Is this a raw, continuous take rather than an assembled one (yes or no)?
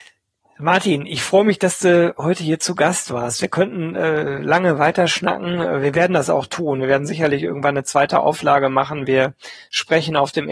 yes